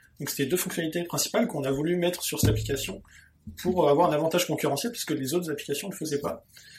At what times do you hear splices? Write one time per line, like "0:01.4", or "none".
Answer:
none